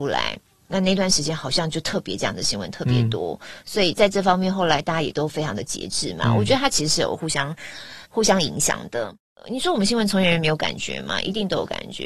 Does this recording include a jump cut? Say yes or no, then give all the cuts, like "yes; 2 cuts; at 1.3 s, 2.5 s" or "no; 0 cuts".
yes; 1 cut; at 8.1 s